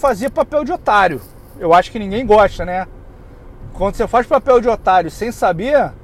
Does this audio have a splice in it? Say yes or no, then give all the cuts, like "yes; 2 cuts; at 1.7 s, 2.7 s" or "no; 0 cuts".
no; 0 cuts